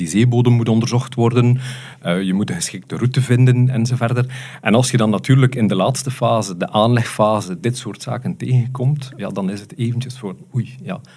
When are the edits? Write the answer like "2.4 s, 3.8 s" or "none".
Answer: 9.2 s

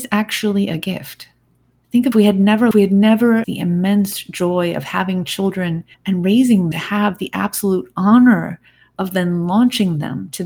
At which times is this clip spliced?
1.6 s, 2.1 s, 2.7 s, 3.4 s, 5.9 s, 6.7 s

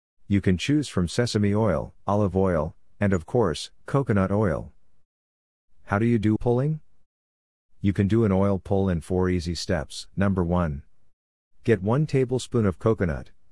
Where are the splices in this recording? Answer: 2.0 s, 3.8 s, 6.4 s, 10.1 s

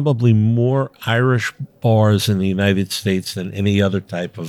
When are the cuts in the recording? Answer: none

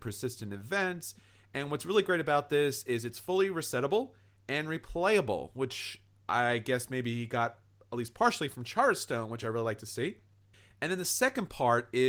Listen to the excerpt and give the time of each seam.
none

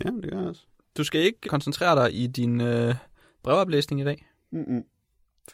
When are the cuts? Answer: 1.4 s

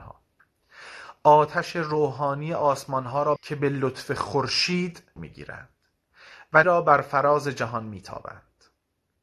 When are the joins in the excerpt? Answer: 3.4 s, 5.2 s, 6.6 s

